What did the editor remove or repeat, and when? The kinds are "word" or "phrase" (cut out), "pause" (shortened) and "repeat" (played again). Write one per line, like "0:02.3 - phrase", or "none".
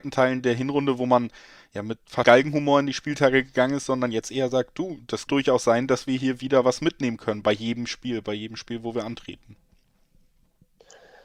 0:02.2 - word
0:05.3 - word